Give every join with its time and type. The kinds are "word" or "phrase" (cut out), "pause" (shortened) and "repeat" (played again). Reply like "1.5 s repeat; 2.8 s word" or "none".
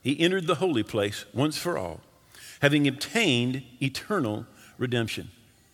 none